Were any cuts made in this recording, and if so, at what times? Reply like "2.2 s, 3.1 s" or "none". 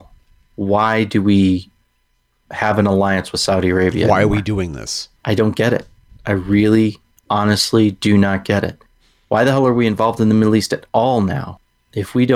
none